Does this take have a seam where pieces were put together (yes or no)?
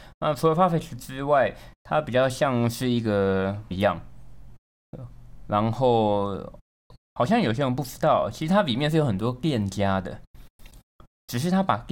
yes